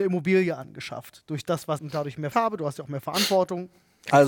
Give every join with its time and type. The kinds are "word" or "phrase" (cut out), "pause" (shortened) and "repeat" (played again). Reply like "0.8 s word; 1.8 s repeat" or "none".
1.8 s phrase; 2.3 s word